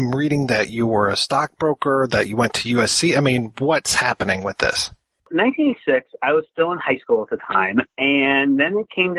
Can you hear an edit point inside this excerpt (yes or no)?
no